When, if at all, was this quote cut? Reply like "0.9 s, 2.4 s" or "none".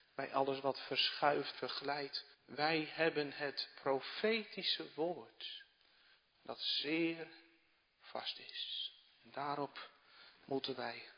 1.5 s, 2.3 s